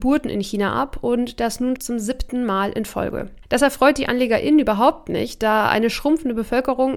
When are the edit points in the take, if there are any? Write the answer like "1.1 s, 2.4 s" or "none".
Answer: 1.8 s